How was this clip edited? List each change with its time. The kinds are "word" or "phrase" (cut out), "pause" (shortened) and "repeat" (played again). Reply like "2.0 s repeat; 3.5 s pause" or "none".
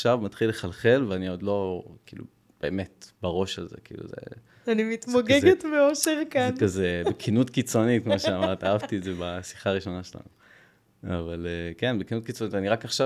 none